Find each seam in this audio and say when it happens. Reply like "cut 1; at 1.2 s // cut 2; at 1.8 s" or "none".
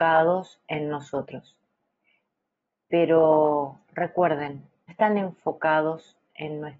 cut 1; at 4.9 s

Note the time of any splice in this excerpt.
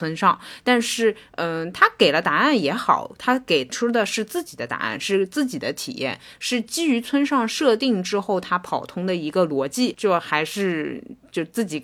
none

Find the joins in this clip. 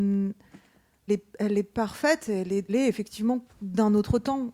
cut 1; at 1.1 s // cut 2; at 2.7 s

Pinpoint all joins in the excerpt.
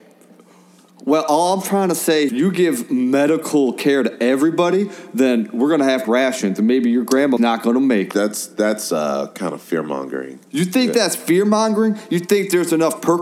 cut 1; at 2.3 s // cut 2; at 6.0 s // cut 3; at 7.4 s // cut 4; at 8.1 s // cut 5; at 10.5 s

